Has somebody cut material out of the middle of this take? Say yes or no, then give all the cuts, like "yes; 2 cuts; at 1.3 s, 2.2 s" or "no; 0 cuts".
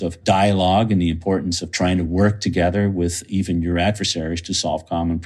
no; 0 cuts